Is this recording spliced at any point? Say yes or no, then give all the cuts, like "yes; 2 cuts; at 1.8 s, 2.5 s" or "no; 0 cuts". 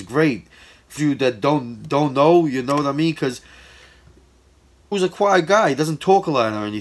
yes; 3 cuts; at 1.0 s, 1.9 s, 4.9 s